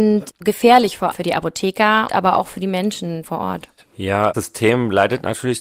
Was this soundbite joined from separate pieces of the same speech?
yes; 4 cuts; at 1.1 s, 2.1 s, 3.2 s, 4.3 s

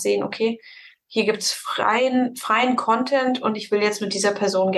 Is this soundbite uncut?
yes; 0 cuts

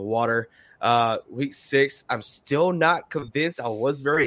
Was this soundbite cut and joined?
no; 0 cuts

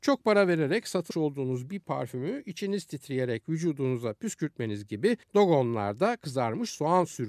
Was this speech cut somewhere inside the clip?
yes; 2 cuts; at 1.1 s, 5.2 s

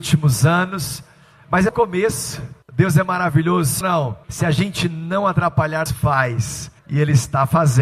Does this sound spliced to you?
yes; 6 cuts; at 1.7 s, 2.6 s, 3.8 s, 4.2 s, 5.9 s, 6.8 s

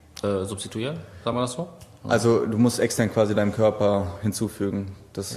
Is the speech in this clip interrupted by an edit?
no; 0 cuts

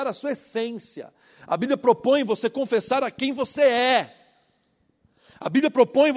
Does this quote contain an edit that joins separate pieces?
no; 0 cuts

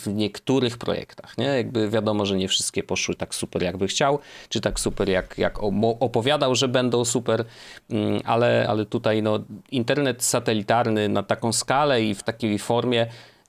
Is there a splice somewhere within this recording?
yes; 1 cut; at 8.7 s

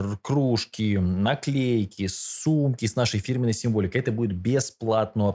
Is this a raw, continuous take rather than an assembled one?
yes; 0 cuts

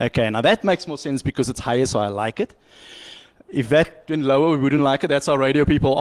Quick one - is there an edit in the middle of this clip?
no; 0 cuts

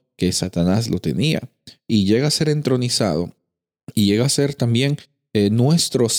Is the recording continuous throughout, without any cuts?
yes; 0 cuts

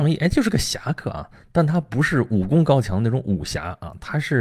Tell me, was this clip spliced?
no; 0 cuts

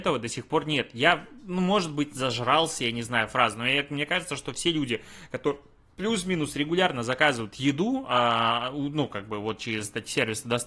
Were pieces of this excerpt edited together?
no; 0 cuts

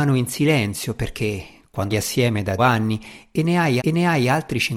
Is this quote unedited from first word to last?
no; 3 cuts; at 1.9 s, 2.6 s, 3.8 s

